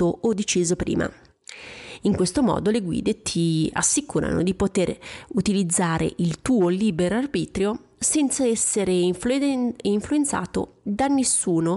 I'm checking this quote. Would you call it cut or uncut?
uncut